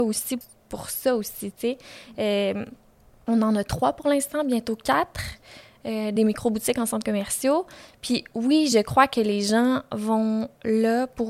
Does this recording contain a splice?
no; 0 cuts

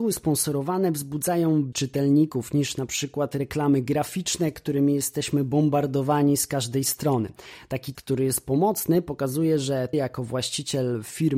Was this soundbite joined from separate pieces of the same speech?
yes; 3 cuts; at 1.7 s, 7.9 s, 9.9 s

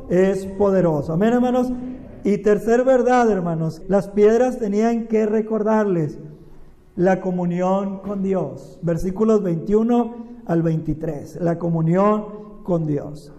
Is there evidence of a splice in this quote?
yes; 1 cut; at 3.8 s

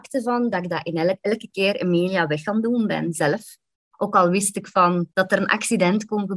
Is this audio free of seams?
no; 1 cut; at 5.1 s

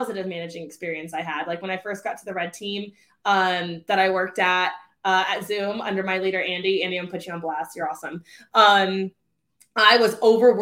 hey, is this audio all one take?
yes; 0 cuts

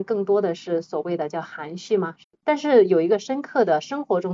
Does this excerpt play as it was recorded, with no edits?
no; 1 cut; at 2.2 s

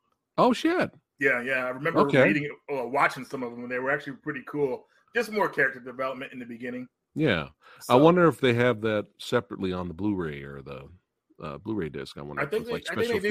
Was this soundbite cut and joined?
no; 0 cuts

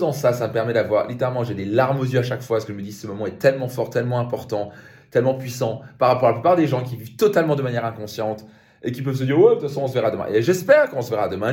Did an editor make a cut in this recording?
no; 0 cuts

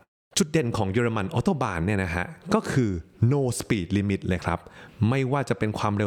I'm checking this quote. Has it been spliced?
no; 0 cuts

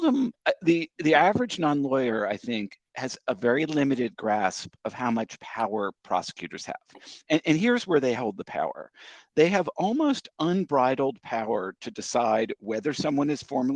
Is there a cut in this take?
no; 0 cuts

